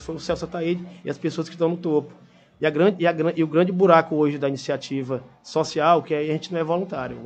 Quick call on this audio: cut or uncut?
uncut